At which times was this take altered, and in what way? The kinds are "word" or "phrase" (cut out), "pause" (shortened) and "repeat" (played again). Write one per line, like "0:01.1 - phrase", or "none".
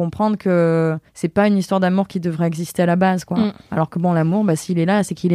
0:01.1 - pause